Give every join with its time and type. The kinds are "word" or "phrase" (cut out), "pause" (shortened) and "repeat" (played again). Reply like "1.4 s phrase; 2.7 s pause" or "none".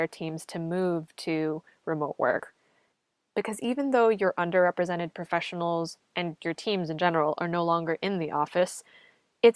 none